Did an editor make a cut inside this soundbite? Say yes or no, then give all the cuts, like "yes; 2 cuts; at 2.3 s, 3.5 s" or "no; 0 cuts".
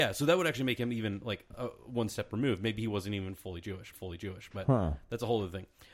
yes; 1 cut; at 3.9 s